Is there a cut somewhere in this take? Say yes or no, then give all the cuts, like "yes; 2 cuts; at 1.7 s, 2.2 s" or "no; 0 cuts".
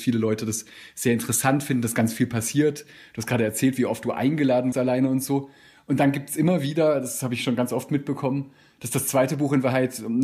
yes; 1 cut; at 4.7 s